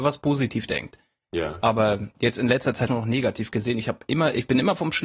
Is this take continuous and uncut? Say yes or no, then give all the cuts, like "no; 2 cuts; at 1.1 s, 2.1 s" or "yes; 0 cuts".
no; 1 cut; at 2.9 s